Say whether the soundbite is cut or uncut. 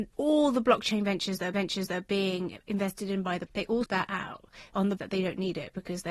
cut